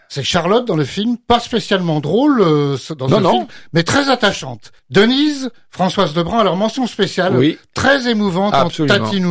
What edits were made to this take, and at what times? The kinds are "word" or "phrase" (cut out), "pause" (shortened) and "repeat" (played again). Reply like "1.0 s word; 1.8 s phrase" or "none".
4.8 s pause